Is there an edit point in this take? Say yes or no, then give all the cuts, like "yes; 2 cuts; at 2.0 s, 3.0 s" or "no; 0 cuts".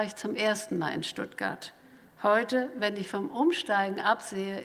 no; 0 cuts